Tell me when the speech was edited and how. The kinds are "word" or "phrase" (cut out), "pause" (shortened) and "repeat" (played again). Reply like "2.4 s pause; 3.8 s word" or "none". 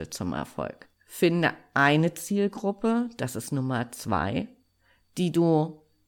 none